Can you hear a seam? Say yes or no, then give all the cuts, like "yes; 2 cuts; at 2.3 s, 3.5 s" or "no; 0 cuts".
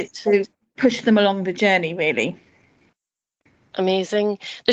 no; 0 cuts